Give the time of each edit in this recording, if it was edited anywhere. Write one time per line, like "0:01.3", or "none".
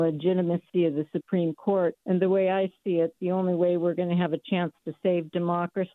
0:02.0